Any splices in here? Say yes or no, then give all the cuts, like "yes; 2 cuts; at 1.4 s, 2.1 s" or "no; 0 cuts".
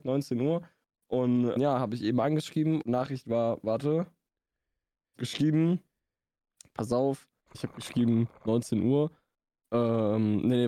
yes; 4 cuts; at 1.6 s, 2.8 s, 5.2 s, 7.5 s